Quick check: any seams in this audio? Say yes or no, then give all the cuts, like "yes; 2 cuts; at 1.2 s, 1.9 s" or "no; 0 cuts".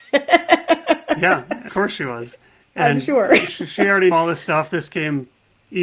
yes; 3 cuts; at 1.7 s, 3.5 s, 4.1 s